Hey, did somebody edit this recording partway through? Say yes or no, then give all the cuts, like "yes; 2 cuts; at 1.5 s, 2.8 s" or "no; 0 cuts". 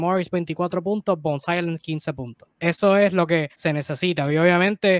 yes; 2 cuts; at 2.5 s, 3.5 s